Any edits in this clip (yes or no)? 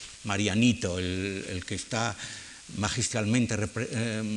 no